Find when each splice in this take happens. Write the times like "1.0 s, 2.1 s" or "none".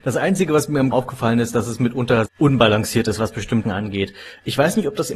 0.9 s, 2.3 s, 3.6 s